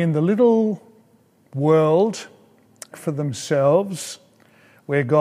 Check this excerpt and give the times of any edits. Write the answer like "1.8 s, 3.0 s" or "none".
2.9 s